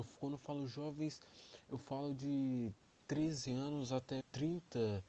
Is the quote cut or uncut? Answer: cut